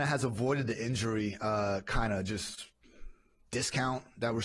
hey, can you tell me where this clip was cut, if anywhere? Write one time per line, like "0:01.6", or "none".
none